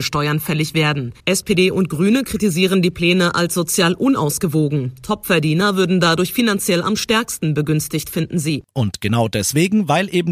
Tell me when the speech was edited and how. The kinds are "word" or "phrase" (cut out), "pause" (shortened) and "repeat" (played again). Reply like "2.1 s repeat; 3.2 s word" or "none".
1.2 s pause

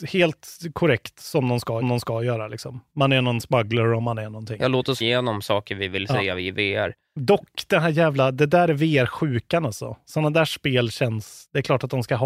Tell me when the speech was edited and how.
1.8 s repeat; 5.0 s word

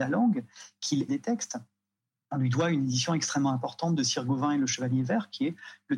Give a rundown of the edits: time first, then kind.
1.1 s word

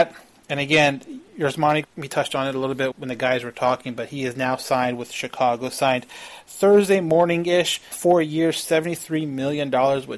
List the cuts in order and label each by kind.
1.8 s word; 2.9 s word; 7.9 s word

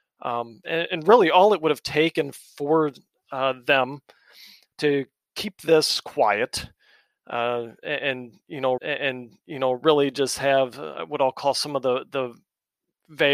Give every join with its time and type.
8.8 s repeat

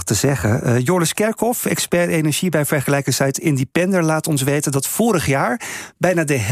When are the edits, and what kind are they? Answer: none

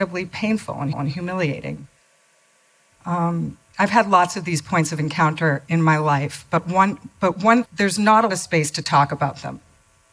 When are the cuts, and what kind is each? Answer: 0.9 s repeat; 3.7 s pause; 5.7 s word; 7.6 s phrase; 8.3 s word

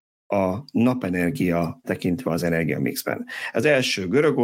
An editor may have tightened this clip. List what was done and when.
1.8 s word

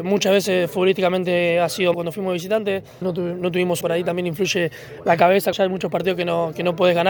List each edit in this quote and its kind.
1.9 s word; 3.0 s phrase; 3.8 s word; 5.5 s word

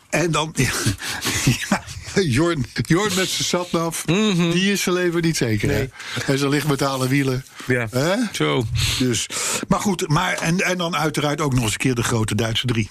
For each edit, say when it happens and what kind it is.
2.8 s word

